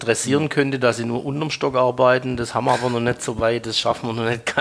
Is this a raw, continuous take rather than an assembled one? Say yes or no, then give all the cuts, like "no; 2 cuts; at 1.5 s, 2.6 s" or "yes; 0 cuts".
yes; 0 cuts